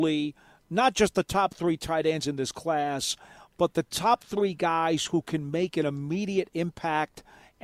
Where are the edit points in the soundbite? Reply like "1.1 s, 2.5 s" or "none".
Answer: none